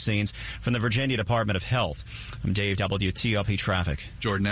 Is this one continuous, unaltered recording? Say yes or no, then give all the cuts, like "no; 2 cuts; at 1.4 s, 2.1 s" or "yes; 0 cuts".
no; 1 cut; at 2.8 s